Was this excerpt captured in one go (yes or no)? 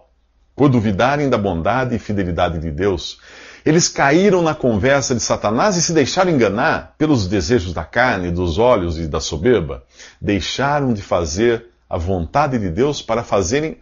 yes